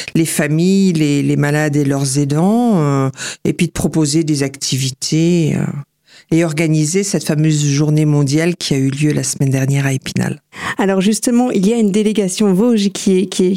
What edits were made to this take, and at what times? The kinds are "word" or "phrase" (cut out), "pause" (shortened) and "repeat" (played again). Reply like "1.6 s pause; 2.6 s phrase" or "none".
none